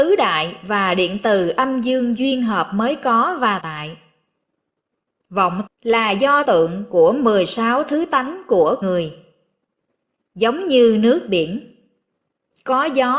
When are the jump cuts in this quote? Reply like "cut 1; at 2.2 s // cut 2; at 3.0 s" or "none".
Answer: cut 1; at 3.6 s // cut 2; at 5.7 s // cut 3; at 6.4 s // cut 4; at 8.8 s